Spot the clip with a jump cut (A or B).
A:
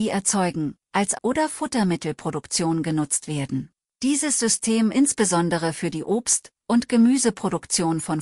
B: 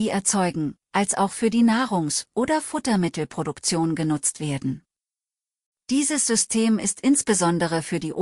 A